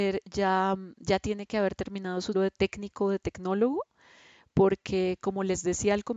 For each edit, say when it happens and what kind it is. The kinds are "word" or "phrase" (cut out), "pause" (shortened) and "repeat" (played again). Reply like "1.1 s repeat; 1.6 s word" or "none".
2.3 s word